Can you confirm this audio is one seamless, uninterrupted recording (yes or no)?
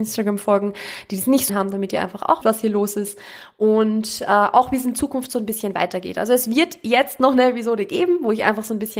no